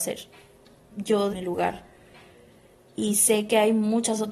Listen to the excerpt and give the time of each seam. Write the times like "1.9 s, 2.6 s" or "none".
1.3 s